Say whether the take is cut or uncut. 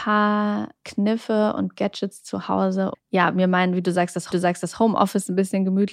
cut